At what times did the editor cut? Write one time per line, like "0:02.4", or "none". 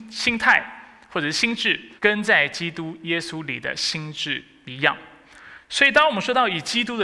0:02.0